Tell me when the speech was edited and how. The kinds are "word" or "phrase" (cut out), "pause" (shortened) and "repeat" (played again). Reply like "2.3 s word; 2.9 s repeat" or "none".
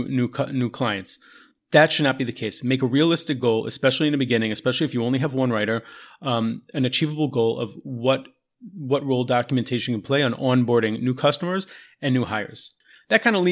none

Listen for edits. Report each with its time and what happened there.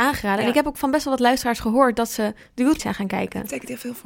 2.8 s word

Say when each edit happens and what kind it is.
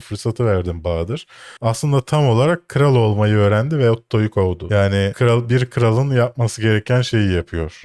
1.6 s pause

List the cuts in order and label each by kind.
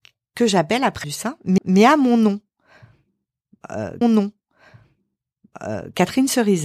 1.0 s phrase; 1.6 s repeat; 4.0 s repeat

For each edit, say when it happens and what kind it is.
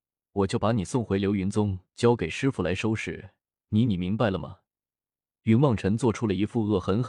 none

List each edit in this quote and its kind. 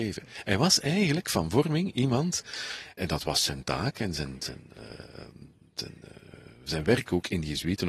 3.0 s word; 3.6 s word; 4.4 s word

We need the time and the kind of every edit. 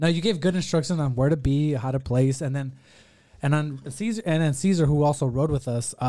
none

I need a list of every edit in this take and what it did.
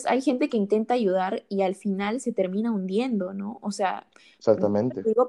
none

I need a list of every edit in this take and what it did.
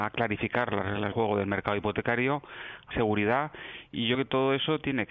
1.1 s word; 2.9 s word; 4.1 s word

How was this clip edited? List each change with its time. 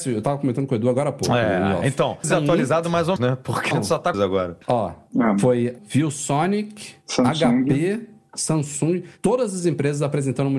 2.2 s phrase; 3.2 s word; 3.7 s word; 4.1 s phrase; 4.6 s pause; 5.8 s phrase

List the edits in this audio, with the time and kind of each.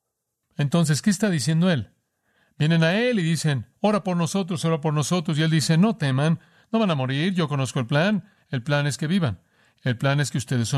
none

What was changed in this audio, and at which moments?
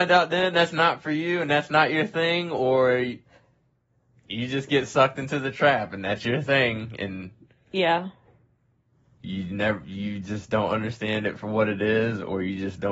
none

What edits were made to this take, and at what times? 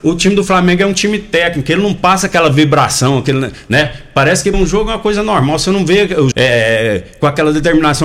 4.5 s word; 6.3 s word

